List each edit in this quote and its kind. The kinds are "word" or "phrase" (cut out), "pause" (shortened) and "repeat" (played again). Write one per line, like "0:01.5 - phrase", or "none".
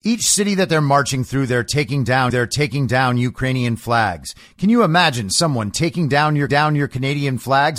0:02.3 - repeat
0:06.5 - repeat